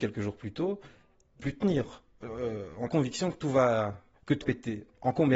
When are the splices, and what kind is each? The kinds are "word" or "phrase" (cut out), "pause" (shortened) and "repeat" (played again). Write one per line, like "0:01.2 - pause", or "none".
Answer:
0:01.4 - phrase
0:02.9 - phrase
0:04.4 - word